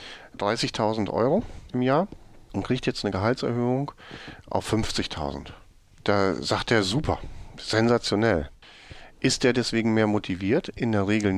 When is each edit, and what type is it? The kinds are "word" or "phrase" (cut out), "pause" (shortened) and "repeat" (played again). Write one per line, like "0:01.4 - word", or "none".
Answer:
none